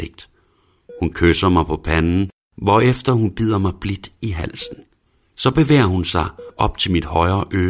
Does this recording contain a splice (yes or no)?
no